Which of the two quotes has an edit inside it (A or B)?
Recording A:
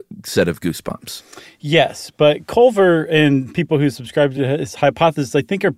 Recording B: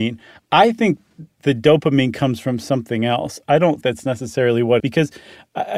B